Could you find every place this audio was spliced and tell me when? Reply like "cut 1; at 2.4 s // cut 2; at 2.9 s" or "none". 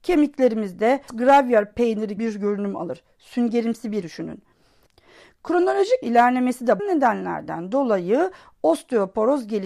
cut 1; at 1.1 s // cut 2; at 2.2 s // cut 3; at 4.0 s // cut 4; at 6.0 s // cut 5; at 6.8 s